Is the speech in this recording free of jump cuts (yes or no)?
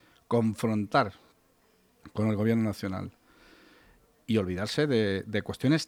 yes